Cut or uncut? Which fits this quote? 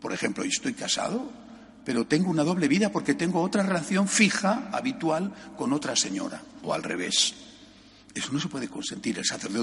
uncut